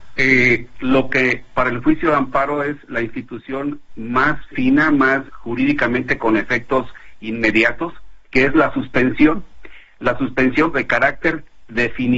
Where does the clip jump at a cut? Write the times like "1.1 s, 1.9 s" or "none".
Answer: 3.9 s, 5.3 s, 8.3 s, 10.7 s